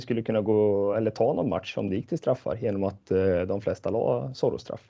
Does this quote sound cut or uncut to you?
uncut